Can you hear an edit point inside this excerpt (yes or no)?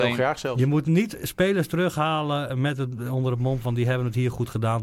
no